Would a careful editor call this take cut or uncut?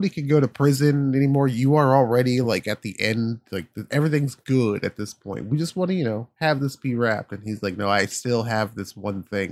uncut